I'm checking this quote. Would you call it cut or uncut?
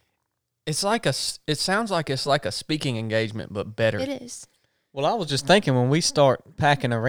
uncut